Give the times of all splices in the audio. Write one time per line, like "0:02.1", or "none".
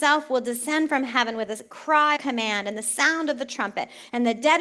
0:02.2